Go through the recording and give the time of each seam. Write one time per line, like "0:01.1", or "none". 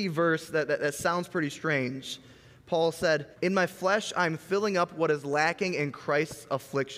0:03.3